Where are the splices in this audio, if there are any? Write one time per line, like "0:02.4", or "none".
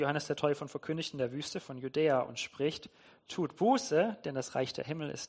none